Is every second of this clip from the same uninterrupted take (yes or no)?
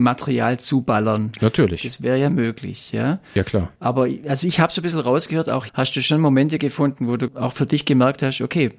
no